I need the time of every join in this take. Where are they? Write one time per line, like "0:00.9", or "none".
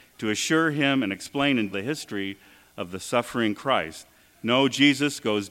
0:01.7

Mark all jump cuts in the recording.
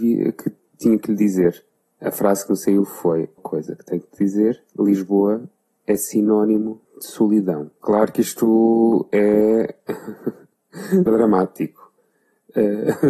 0:01.8
0:03.4
0:04.7
0:06.8
0:07.8
0:11.1

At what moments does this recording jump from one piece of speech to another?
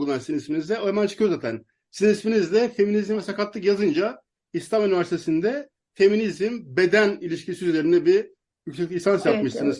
none

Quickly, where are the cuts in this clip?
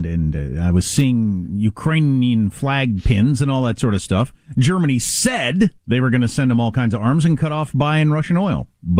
0:05.8

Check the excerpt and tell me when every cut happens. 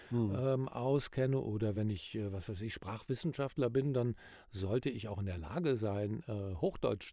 none

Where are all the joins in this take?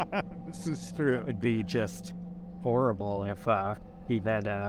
none

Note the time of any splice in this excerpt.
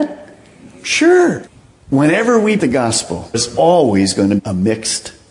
0:02.6
0:03.3
0:04.4

